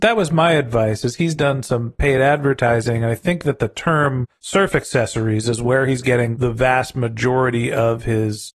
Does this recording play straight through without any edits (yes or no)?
yes